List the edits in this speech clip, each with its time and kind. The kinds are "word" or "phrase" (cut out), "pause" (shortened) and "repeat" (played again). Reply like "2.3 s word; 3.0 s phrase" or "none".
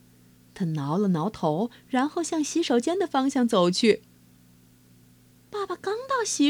none